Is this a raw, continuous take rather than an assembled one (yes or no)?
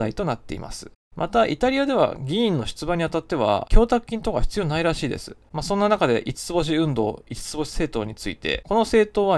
no